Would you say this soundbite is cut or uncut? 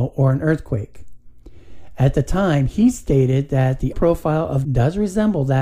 cut